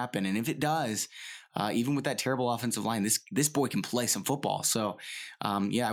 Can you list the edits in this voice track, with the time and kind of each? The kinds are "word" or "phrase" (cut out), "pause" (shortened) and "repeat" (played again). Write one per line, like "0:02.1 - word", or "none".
none

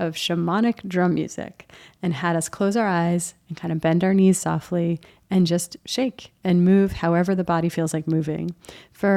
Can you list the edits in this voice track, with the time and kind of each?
none

